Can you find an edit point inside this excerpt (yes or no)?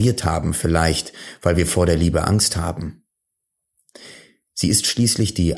no